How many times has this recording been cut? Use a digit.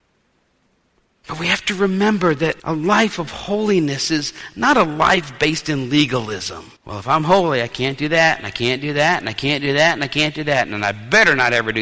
2